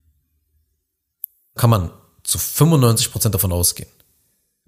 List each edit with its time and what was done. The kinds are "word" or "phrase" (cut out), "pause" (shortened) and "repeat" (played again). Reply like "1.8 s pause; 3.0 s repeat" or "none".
1.6 s word